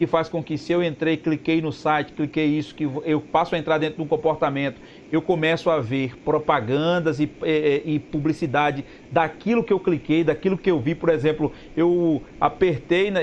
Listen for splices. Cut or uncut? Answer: uncut